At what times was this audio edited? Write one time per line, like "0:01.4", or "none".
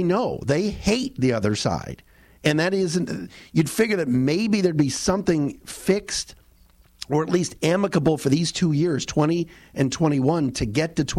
none